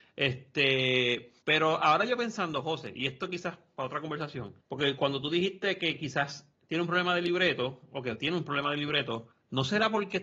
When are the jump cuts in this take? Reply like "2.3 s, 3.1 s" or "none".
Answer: 1.4 s, 4.6 s, 6.5 s, 9.3 s

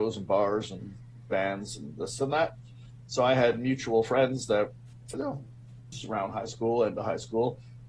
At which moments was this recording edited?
5.1 s, 5.9 s

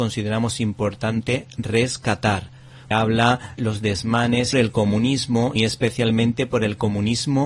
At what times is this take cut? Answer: 2.9 s, 3.6 s, 4.5 s, 5.6 s

